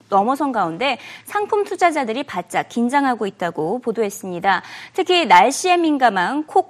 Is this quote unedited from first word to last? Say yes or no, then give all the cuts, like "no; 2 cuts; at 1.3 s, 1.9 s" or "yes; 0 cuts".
yes; 0 cuts